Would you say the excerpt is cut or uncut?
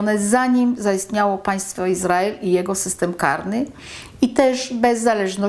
uncut